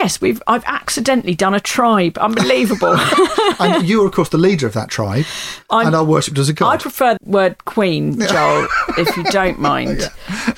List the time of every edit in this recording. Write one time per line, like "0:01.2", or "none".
0:07.2